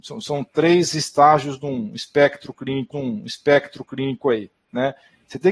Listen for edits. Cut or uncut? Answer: cut